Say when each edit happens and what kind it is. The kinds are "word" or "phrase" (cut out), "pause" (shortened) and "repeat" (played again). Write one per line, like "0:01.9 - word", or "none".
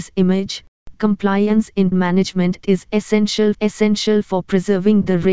0:00.9 - word
0:01.9 - word
0:03.5 - repeat